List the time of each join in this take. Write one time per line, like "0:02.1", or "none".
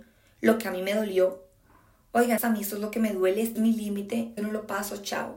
0:02.4
0:03.6
0:04.4